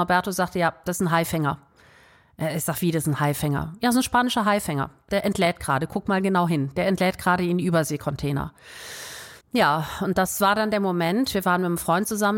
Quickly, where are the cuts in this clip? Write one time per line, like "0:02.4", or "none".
0:09.4